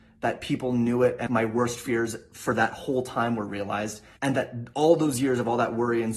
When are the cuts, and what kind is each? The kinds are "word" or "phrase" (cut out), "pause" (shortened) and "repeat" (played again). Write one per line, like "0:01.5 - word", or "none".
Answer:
0:01.3 - word